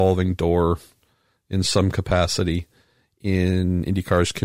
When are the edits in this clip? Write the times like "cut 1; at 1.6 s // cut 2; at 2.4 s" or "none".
none